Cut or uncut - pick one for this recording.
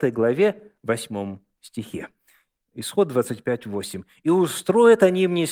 uncut